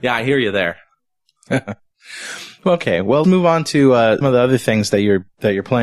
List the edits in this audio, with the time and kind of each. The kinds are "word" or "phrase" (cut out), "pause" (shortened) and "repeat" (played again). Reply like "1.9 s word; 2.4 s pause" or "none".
3.2 s word; 4.2 s word